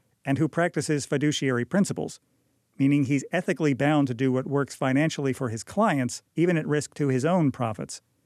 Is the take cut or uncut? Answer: uncut